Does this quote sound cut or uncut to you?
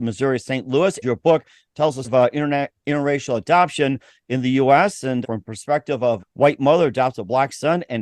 cut